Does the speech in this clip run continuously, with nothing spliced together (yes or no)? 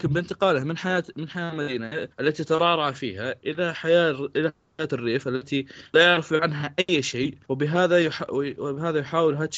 no